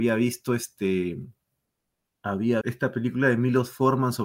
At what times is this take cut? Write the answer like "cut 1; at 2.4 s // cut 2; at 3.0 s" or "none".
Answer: cut 1; at 2.6 s